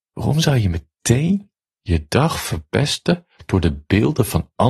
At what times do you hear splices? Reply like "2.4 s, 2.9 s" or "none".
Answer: none